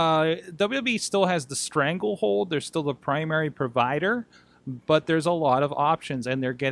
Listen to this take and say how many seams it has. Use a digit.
0